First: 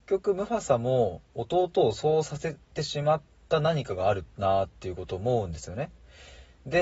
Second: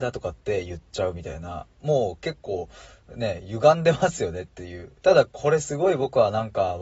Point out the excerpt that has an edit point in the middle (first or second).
second